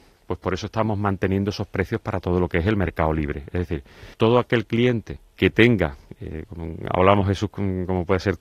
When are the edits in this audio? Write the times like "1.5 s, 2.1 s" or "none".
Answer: 4.1 s, 5.3 s